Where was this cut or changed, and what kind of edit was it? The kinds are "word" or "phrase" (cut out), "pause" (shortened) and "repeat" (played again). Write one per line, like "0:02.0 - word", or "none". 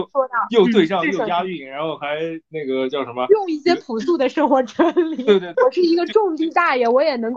0:05.5 - word